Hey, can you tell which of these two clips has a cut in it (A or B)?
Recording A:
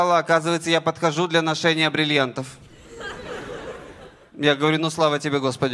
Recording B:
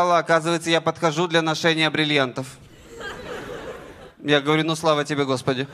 B